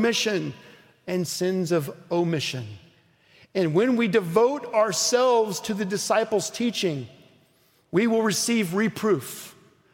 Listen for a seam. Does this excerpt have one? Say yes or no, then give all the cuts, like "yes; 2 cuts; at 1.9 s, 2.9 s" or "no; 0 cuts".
no; 0 cuts